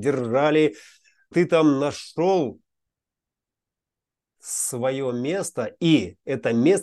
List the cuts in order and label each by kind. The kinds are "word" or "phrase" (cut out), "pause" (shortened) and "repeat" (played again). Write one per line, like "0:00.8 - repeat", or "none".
0:01.3 - word